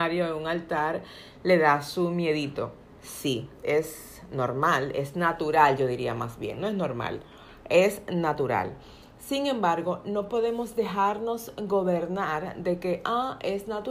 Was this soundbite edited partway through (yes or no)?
no